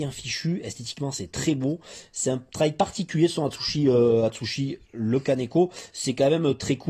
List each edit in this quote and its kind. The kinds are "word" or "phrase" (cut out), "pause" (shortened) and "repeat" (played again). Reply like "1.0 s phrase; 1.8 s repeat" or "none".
none